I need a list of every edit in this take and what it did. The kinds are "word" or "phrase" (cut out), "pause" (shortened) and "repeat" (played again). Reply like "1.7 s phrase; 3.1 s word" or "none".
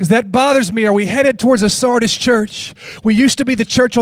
none